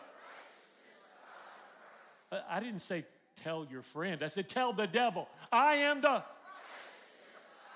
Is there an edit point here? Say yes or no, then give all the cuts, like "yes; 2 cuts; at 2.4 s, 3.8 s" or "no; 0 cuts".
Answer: no; 0 cuts